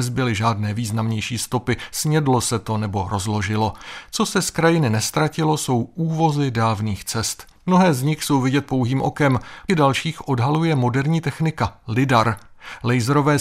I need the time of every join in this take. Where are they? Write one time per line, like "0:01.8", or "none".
0:07.6
0:09.7